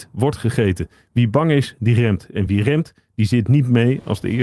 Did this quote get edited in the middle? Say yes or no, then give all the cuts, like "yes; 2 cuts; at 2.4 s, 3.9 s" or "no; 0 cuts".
no; 0 cuts